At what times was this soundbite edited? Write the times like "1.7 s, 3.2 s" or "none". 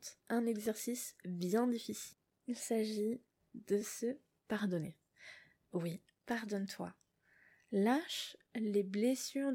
none